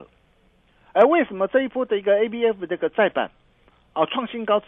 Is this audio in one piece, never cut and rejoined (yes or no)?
yes